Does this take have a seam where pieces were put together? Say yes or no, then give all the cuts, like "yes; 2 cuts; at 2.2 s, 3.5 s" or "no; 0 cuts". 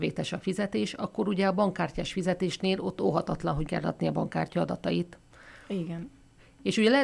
yes; 1 cut; at 3.7 s